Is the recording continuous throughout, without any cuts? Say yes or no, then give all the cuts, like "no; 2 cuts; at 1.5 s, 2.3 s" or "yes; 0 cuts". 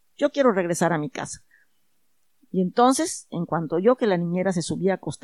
yes; 0 cuts